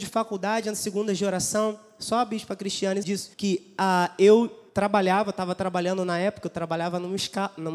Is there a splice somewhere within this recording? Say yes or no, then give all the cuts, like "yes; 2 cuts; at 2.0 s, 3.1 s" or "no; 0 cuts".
yes; 3 cuts; at 3.0 s, 3.3 s, 4.7 s